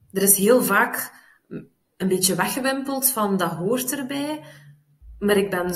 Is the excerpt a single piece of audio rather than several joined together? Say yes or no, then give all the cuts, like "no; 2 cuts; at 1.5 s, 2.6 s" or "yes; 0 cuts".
yes; 0 cuts